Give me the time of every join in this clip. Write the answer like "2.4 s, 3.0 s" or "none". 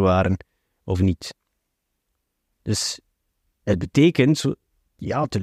none